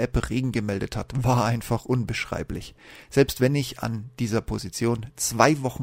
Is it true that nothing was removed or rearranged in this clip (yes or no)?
yes